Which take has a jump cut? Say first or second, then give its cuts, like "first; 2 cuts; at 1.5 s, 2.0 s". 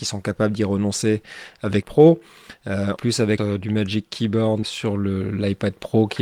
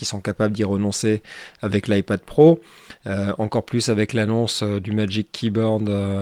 first; 4 cuts; at 1.8 s, 3.0 s, 3.4 s, 4.6 s